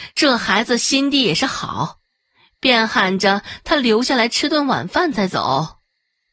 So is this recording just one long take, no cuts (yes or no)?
yes